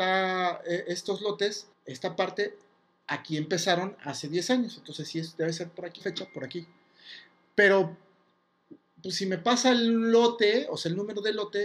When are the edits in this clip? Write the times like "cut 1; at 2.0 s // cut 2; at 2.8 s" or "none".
cut 1; at 1.7 s // cut 2; at 6.0 s